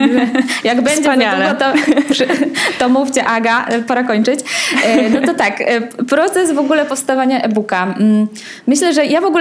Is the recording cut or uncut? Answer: uncut